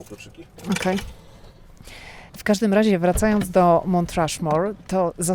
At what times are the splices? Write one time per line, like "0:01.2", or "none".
0:02.3